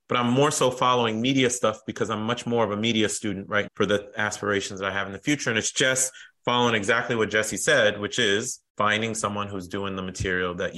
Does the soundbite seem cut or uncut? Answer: cut